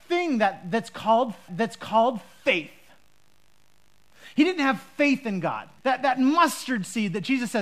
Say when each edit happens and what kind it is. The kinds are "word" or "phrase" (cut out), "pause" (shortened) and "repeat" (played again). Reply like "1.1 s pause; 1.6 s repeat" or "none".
1.5 s repeat; 5.8 s pause